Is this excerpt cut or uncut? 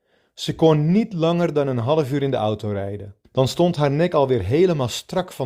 cut